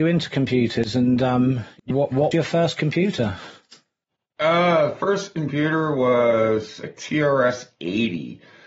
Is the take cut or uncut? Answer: cut